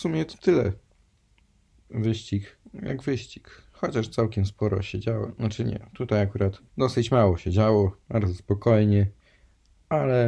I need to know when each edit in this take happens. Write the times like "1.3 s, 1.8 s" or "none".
2.6 s, 6.7 s, 8.0 s